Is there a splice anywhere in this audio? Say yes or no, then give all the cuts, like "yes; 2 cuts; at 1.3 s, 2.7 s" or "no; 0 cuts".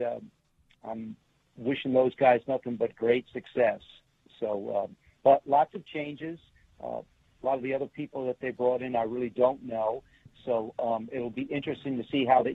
no; 0 cuts